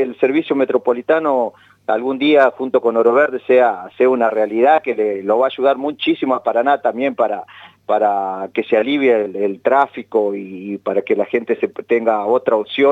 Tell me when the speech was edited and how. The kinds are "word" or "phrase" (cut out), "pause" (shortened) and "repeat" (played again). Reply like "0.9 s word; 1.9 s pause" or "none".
none